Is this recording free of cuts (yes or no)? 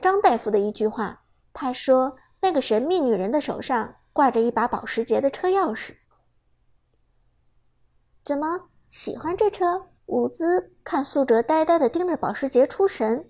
no